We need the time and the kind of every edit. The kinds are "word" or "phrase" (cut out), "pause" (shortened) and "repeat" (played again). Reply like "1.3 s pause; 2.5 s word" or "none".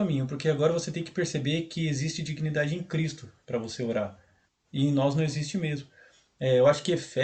none

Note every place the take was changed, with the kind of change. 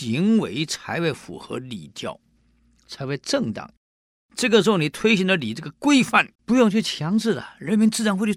6.4 s pause

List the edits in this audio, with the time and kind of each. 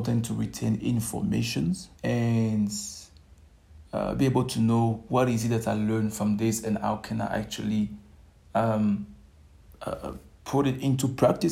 1.9 s pause; 9.6 s pause

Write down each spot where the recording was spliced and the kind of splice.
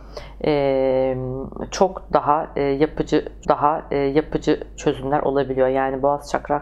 3.4 s repeat

